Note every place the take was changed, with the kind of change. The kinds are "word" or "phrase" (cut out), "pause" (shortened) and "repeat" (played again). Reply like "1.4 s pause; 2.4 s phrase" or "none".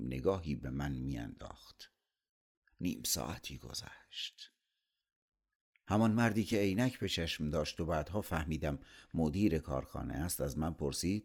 none